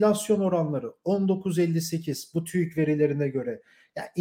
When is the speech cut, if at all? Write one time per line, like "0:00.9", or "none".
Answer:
none